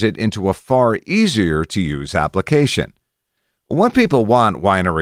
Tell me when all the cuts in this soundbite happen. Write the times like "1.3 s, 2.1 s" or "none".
none